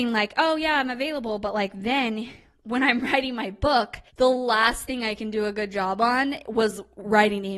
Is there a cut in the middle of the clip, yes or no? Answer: yes